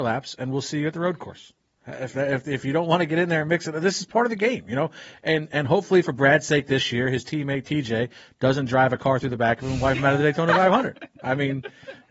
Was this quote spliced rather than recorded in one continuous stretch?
no; 0 cuts

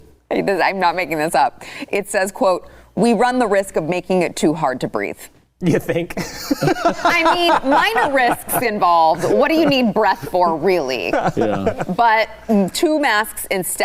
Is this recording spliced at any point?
no; 0 cuts

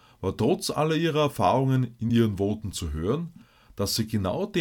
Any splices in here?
no; 0 cuts

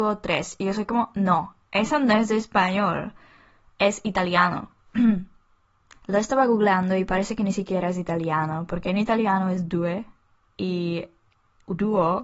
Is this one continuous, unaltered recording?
yes; 0 cuts

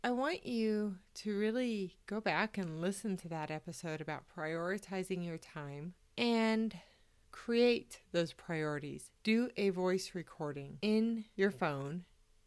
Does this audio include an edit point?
yes; 2 cuts; at 6.0 s, 9.2 s

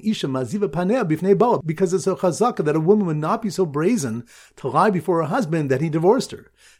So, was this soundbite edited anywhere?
no; 0 cuts

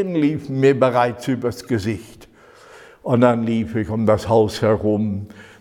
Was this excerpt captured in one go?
yes; 0 cuts

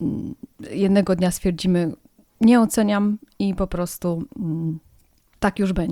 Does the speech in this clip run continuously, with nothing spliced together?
yes; 0 cuts

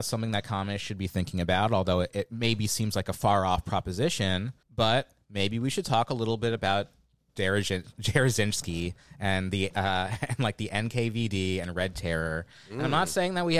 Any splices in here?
yes; 1 cut; at 4.6 s

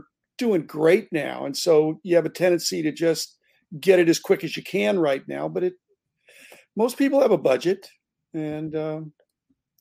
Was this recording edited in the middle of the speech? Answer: no; 0 cuts

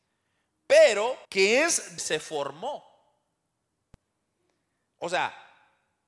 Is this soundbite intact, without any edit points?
no; 2 cuts; at 1.2 s, 2.0 s

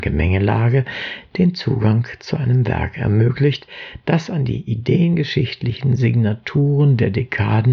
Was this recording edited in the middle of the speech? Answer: no; 0 cuts

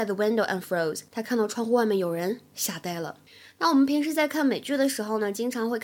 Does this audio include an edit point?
yes; 2 cuts; at 1.1 s, 3.3 s

